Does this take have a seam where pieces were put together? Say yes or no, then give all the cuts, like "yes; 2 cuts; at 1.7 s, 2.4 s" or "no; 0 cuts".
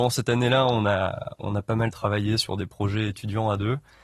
no; 0 cuts